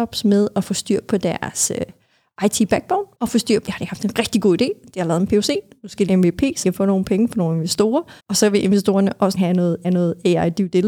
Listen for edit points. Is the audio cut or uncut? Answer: cut